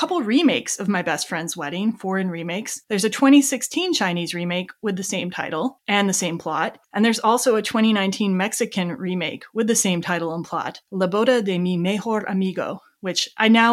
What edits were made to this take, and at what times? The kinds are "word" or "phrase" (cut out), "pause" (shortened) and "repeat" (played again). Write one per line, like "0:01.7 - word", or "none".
0:02.8 - pause
0:06.8 - pause
0:10.8 - pause